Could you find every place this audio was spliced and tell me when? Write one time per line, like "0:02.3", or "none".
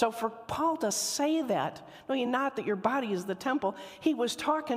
none